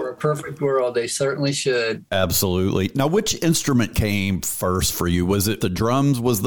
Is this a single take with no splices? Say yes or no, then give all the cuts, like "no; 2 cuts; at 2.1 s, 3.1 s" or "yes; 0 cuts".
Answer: yes; 0 cuts